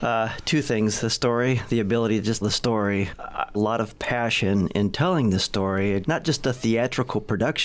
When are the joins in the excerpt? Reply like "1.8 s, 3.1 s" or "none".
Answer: 2.4 s, 3.5 s, 6.0 s